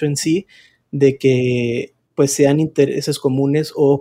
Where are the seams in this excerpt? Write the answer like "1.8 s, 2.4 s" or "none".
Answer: none